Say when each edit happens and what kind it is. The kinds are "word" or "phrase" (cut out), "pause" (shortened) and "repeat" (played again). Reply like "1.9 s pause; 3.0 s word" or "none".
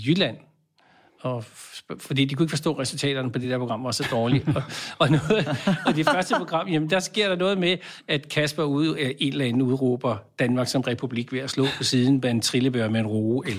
none

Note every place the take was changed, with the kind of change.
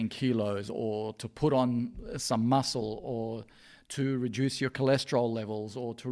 none

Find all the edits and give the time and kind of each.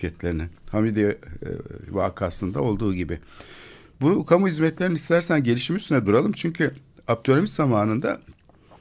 none

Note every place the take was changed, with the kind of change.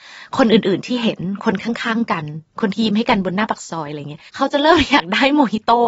2.5 s pause; 4.3 s pause

